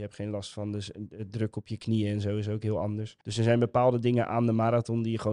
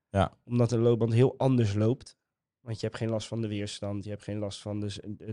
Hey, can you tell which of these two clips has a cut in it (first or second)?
first